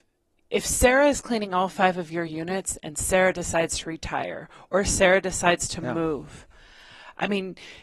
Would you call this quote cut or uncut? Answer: uncut